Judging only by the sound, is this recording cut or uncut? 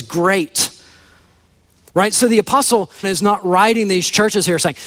cut